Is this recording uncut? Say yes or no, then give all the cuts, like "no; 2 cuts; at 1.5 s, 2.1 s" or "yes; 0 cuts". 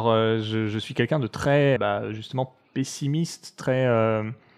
no; 1 cut; at 1.8 s